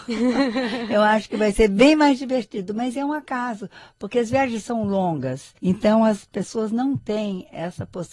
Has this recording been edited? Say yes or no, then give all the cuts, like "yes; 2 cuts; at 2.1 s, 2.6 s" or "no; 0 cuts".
yes; 1 cut; at 5.6 s